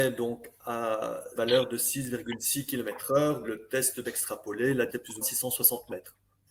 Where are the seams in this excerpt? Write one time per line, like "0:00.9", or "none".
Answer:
0:01.3
0:03.4
0:04.0
0:04.9
0:05.2